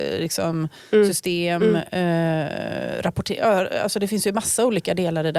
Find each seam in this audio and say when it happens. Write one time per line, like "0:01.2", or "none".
none